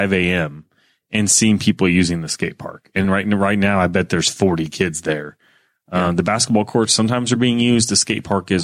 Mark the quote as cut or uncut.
uncut